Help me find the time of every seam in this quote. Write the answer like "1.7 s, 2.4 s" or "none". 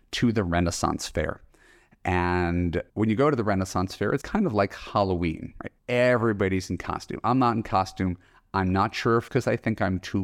2.9 s, 4.2 s, 5.8 s, 9.3 s